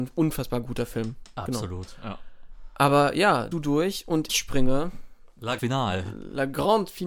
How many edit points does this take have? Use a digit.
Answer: 3